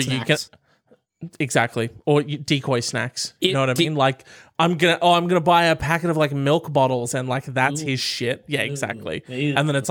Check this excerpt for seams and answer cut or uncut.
uncut